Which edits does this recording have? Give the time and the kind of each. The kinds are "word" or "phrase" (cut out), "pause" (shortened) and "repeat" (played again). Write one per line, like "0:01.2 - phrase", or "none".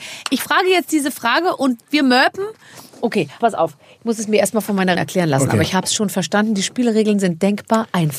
0:03.4 - word
0:05.0 - word